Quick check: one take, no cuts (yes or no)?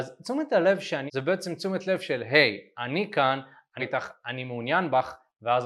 no